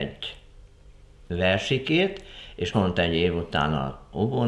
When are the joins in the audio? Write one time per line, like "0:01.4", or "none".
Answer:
0:02.7

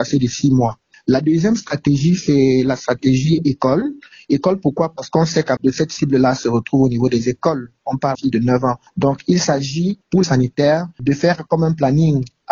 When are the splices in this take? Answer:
0:05.6
0:08.1
0:10.2

